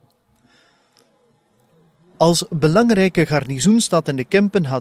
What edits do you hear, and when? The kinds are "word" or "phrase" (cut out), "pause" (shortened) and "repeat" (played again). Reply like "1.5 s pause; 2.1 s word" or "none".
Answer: none